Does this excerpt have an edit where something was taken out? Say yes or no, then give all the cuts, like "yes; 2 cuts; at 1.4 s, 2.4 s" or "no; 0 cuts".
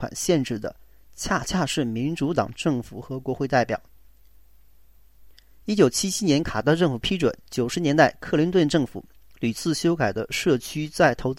yes; 1 cut; at 7.4 s